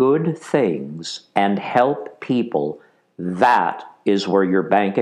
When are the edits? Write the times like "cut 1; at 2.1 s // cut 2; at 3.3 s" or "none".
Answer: none